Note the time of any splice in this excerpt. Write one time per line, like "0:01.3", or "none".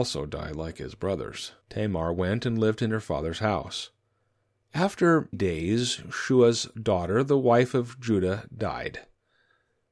0:01.6
0:05.3